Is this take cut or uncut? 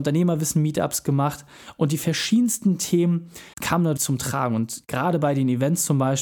cut